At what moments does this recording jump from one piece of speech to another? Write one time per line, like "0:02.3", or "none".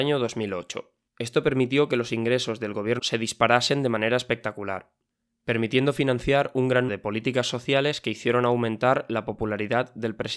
0:01.1
0:03.0
0:06.9